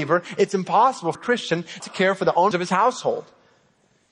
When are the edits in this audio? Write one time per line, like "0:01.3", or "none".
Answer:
0:01.1
0:01.8
0:02.5